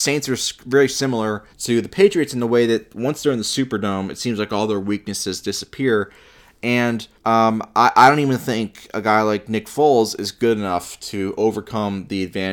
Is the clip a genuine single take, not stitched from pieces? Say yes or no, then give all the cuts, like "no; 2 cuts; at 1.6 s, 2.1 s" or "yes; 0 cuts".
no; 2 cuts; at 1.5 s, 7.2 s